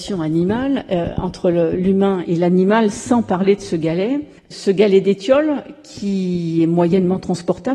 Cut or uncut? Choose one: cut